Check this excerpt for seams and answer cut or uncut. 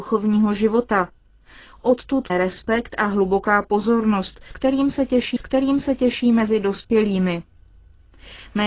cut